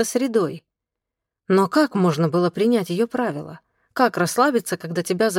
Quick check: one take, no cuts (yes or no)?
yes